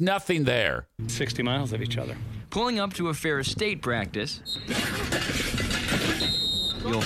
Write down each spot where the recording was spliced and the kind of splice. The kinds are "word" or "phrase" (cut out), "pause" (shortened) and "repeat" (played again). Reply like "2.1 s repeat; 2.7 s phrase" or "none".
1.1 s word